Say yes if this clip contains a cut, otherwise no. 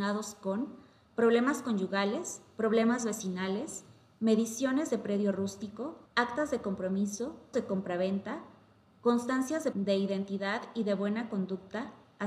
yes